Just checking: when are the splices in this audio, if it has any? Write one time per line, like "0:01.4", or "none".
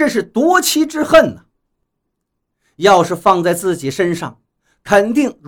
none